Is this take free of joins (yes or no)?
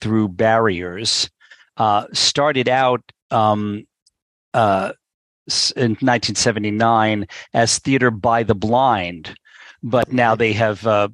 yes